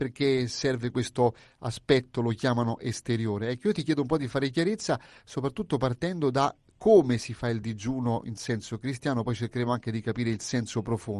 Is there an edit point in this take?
no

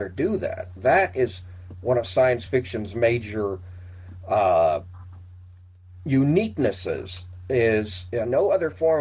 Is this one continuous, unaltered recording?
yes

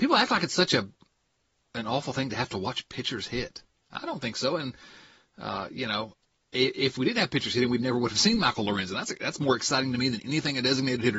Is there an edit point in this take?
no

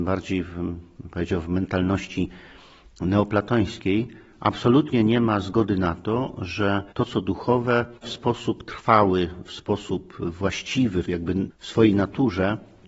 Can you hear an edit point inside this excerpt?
yes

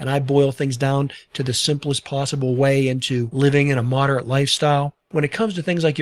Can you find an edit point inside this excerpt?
yes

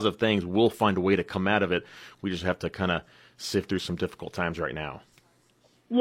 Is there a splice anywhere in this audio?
no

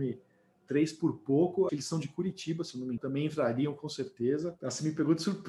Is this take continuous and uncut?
no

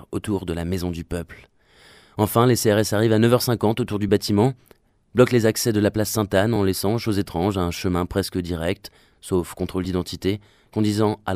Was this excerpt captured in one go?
yes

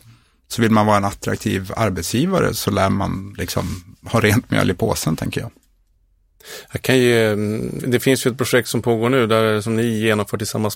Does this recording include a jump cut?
yes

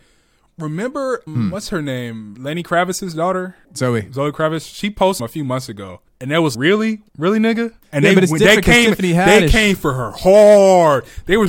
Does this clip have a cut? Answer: yes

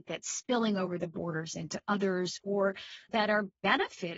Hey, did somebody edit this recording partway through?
no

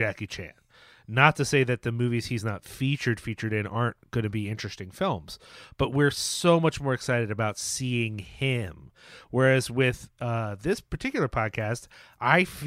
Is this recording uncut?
yes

